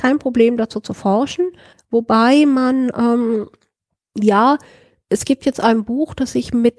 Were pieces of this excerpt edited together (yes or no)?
no